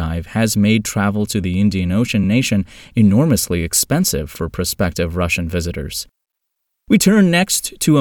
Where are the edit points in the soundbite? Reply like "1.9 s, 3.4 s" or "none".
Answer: none